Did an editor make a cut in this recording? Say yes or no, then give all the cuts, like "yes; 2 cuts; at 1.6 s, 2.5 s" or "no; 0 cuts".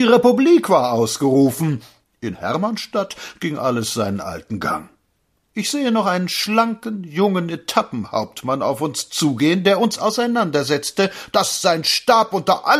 no; 0 cuts